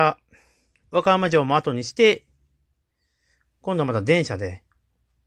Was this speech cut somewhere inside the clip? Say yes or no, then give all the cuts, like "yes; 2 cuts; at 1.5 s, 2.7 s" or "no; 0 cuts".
no; 0 cuts